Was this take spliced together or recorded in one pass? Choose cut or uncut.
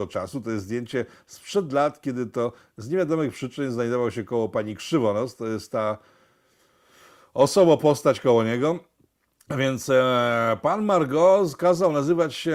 uncut